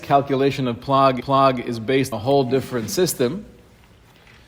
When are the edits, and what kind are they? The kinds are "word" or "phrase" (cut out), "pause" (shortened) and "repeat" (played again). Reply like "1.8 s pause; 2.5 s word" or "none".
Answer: 1.2 s repeat; 2.1 s word